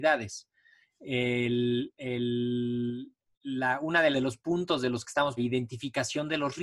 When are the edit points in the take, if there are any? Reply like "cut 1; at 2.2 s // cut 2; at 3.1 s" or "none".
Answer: cut 1; at 4.1 s // cut 2; at 5.4 s